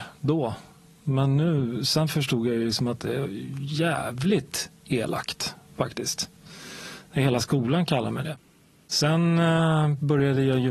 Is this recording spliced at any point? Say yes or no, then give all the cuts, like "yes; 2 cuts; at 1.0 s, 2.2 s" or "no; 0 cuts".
no; 0 cuts